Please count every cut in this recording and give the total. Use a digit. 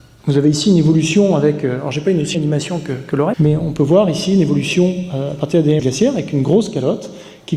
3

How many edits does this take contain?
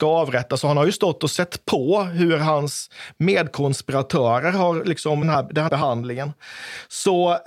2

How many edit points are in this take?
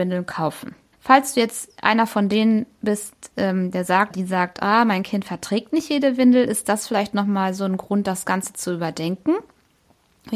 2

